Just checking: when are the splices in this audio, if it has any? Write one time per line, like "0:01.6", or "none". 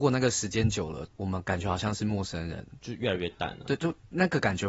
0:01.1